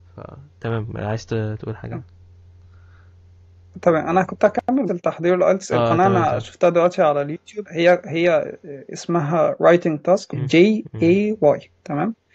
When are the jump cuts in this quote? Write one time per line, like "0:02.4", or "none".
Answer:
0:04.9
0:07.7
0:10.3